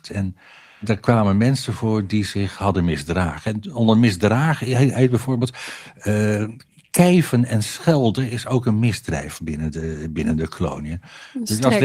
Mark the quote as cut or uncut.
uncut